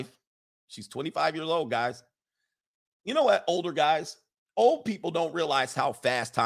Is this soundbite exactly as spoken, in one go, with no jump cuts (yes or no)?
yes